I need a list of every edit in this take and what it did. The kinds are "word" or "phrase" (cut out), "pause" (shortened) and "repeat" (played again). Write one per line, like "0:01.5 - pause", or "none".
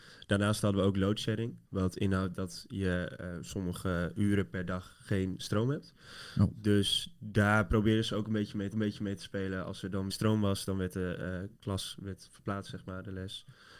0:01.6 - pause
0:08.7 - repeat
0:10.1 - phrase